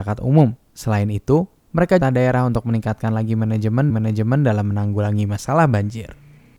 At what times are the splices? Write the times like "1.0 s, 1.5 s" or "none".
2.0 s, 3.9 s